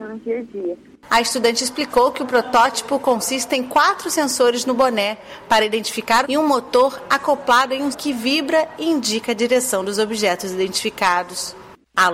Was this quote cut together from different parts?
yes; 2 cuts; at 6.2 s, 7.9 s

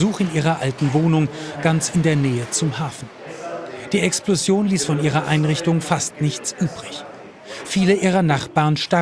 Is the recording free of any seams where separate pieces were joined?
yes; 0 cuts

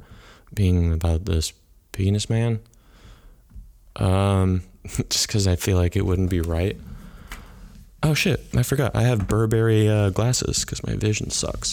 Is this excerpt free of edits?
yes; 0 cuts

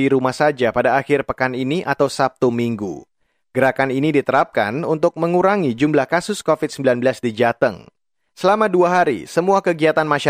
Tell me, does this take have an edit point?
no; 0 cuts

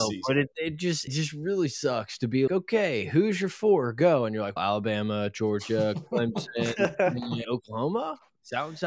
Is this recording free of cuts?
no; 4 cuts; at 1.1 s, 2.5 s, 4.6 s, 7.4 s

